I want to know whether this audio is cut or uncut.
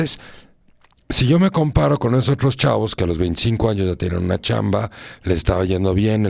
uncut